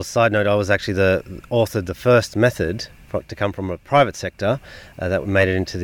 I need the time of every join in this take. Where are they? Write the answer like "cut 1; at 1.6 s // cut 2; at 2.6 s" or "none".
none

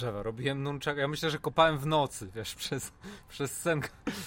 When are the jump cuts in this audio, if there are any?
none

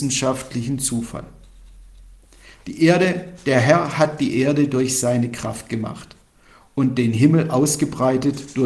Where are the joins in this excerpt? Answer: none

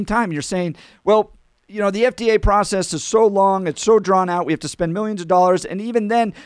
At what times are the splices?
none

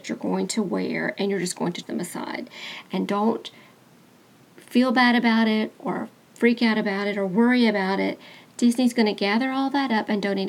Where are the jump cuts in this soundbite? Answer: cut 1; at 1.8 s

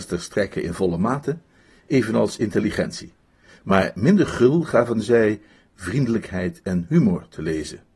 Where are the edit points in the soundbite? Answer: none

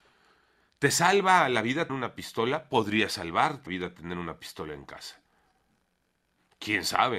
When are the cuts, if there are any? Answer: cut 1; at 1.9 s // cut 2; at 3.7 s

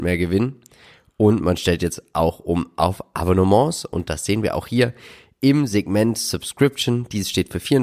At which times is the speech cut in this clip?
none

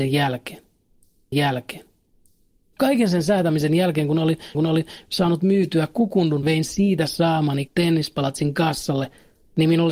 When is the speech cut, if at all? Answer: cut 1; at 1.3 s // cut 2; at 4.5 s // cut 3; at 6.4 s // cut 4; at 7.7 s

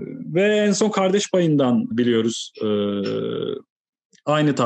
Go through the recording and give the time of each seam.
cut 1; at 1.9 s

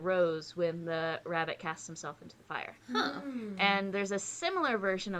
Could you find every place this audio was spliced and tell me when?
cut 1; at 2.8 s

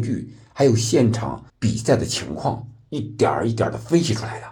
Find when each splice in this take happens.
cut 1; at 1.5 s

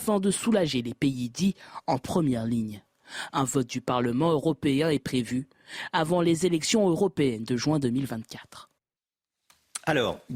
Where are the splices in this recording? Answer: none

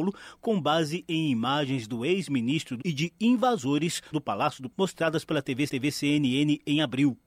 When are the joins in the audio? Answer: cut 1; at 2.8 s // cut 2; at 4.1 s // cut 3; at 4.7 s // cut 4; at 5.7 s

